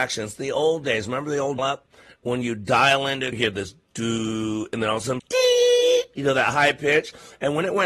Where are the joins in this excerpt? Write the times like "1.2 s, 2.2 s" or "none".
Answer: 1.6 s, 3.3 s, 5.2 s